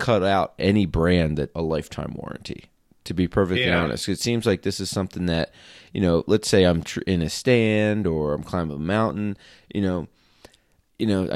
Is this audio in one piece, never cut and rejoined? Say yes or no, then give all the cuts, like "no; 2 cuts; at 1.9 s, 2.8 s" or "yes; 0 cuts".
no; 1 cut; at 1.5 s